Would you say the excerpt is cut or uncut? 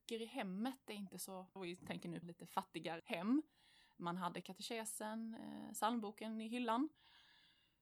cut